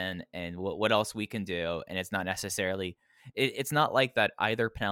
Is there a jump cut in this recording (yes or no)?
no